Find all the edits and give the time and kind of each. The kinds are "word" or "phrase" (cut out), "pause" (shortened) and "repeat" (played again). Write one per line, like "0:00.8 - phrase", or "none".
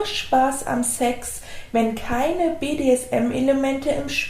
none

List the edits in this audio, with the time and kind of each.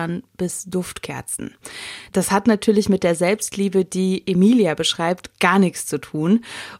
none

